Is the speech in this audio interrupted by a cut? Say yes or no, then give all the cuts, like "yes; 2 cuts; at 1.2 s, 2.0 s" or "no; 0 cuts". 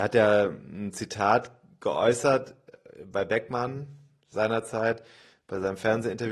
no; 0 cuts